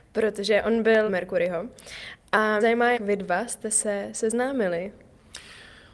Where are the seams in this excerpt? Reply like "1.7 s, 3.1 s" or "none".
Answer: 1.1 s, 2.6 s, 2.9 s